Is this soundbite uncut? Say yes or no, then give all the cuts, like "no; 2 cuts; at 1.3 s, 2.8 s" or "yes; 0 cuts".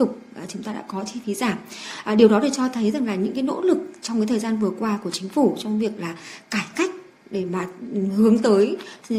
yes; 0 cuts